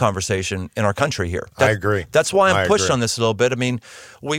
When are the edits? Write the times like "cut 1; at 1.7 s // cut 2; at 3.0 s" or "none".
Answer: cut 1; at 1.5 s